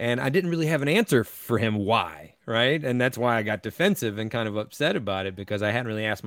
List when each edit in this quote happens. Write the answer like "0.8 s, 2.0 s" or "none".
none